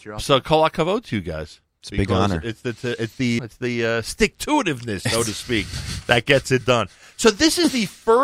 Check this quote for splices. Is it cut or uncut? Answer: cut